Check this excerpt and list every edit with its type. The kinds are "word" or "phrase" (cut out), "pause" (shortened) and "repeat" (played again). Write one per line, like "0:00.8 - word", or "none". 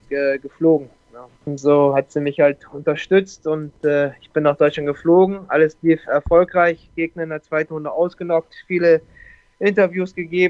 0:01.4 - pause